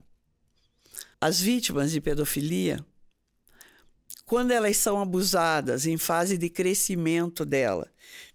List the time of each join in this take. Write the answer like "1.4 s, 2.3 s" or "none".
1.1 s